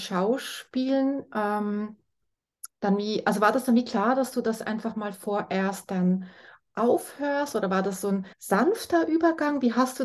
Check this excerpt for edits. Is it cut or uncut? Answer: cut